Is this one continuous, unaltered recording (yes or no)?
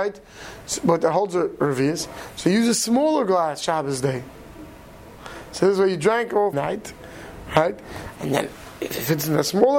no